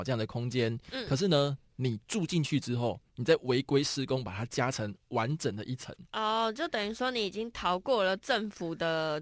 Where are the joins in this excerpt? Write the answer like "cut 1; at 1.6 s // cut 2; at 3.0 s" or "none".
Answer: none